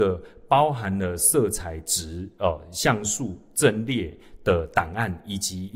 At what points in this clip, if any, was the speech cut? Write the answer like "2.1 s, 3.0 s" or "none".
none